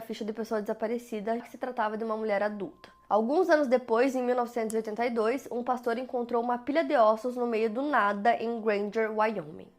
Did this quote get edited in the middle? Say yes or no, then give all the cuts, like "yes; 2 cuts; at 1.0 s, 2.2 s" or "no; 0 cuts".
yes; 1 cut; at 1.4 s